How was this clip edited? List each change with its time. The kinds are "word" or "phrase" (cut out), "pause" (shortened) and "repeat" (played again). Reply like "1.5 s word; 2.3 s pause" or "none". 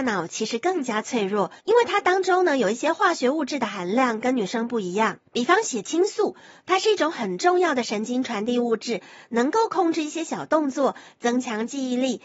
1.6 s pause; 5.3 s pause